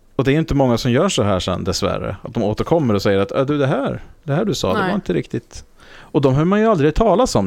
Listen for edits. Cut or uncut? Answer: uncut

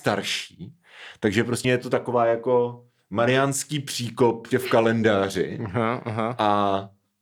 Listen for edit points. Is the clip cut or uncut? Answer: cut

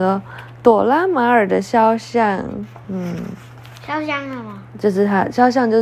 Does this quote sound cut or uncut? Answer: uncut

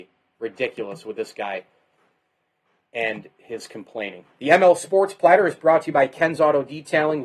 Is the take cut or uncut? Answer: uncut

